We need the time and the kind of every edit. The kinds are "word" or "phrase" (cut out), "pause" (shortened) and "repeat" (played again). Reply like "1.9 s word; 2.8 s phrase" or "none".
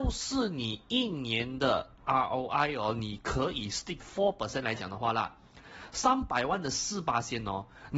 2.0 s word; 4.0 s word